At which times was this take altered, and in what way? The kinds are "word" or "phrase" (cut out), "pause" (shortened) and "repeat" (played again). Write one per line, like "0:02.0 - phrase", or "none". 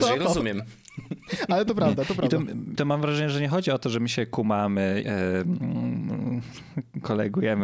0:02.8 - word
0:05.0 - word